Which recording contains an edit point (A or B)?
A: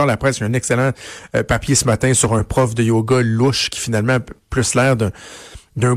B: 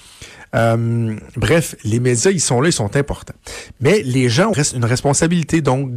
B